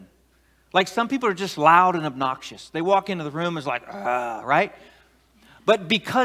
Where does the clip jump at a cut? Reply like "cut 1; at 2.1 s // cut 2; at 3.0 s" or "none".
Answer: none